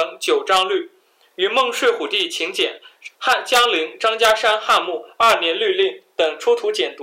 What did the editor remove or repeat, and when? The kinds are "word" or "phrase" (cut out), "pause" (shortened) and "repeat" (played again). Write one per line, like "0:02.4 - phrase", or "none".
0:03.2 - pause